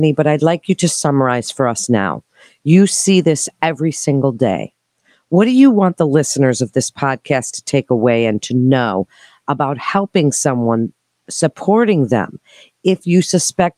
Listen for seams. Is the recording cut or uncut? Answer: uncut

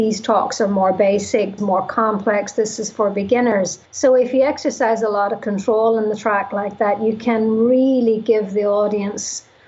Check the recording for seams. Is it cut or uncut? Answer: cut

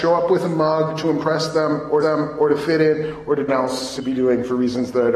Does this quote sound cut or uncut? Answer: cut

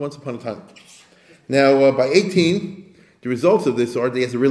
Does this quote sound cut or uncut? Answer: uncut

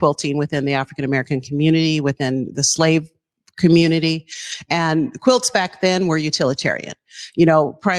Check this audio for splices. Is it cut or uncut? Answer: uncut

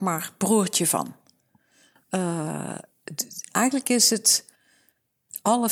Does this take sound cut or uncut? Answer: uncut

